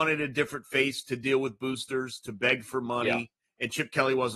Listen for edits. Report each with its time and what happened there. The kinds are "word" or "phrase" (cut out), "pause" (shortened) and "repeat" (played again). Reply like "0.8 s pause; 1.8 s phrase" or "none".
none